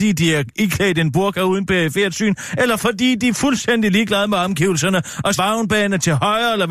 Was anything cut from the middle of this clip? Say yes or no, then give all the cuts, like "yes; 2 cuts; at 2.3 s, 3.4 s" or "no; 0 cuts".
yes; 1 cut; at 5.4 s